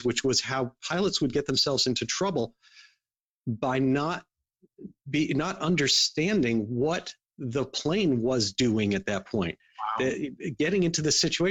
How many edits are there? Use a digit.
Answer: 0